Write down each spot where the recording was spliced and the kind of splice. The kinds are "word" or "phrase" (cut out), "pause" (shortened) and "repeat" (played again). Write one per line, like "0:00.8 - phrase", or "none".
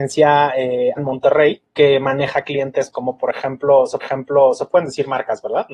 0:01.0 - word
0:01.7 - pause
0:02.9 - phrase
0:04.0 - repeat